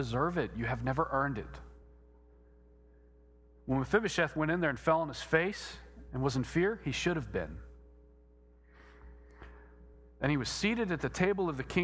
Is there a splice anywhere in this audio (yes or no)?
no